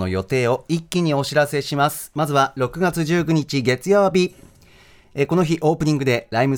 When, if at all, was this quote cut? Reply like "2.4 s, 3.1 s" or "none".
none